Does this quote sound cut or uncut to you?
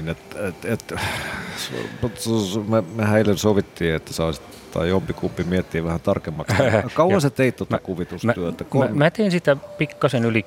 uncut